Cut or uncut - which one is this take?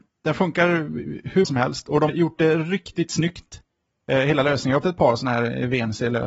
cut